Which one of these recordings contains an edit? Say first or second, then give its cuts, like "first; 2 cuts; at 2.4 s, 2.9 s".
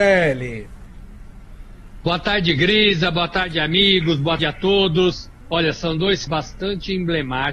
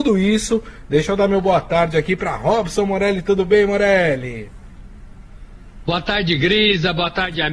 first; 2 cuts; at 4.4 s, 6.3 s